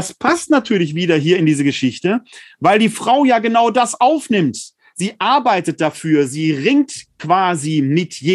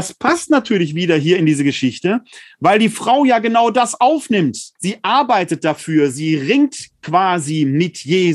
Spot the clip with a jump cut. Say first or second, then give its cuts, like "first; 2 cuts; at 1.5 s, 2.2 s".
second; 1 cut; at 4.8 s